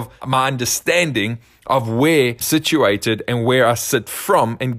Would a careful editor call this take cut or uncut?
cut